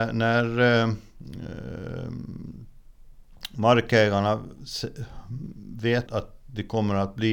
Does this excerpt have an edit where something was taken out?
yes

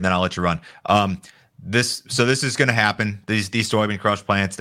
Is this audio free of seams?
yes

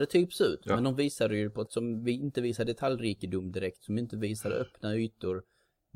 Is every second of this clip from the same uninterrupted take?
no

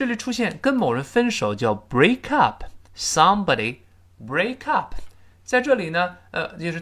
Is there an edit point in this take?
yes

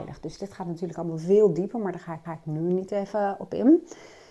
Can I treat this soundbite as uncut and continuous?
no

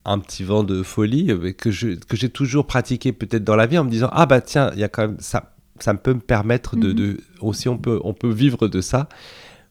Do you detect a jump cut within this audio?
no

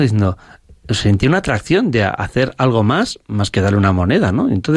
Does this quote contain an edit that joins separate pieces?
no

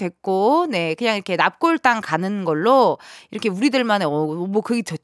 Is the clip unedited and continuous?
yes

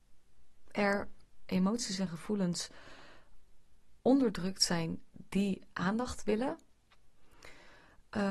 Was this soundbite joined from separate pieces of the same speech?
no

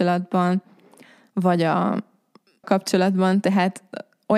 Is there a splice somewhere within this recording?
yes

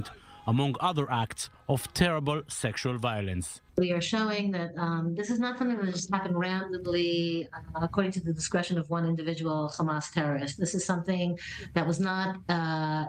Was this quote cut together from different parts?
yes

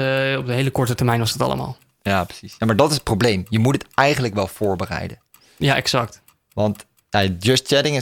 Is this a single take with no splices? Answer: yes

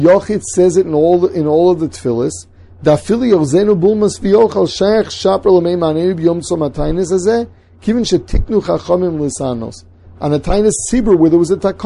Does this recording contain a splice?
no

